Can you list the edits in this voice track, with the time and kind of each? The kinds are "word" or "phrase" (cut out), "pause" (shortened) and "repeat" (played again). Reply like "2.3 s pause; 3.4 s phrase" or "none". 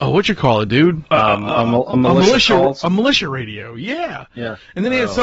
1.1 s pause